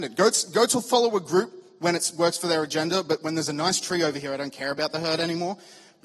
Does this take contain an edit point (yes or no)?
no